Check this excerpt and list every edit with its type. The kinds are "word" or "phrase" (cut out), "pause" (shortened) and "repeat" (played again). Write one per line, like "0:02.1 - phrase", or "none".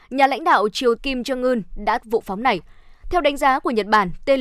0:01.0 - word
0:02.0 - phrase